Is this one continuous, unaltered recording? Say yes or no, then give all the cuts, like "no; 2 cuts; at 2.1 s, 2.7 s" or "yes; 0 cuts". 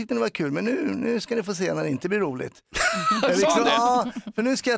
yes; 0 cuts